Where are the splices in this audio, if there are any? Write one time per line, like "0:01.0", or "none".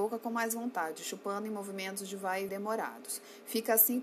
0:02.5